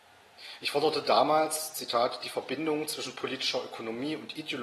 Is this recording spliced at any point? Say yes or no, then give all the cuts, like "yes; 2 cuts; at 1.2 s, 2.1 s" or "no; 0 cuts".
no; 0 cuts